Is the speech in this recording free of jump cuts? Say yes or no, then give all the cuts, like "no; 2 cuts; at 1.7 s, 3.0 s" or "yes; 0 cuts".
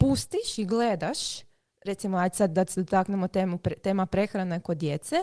yes; 0 cuts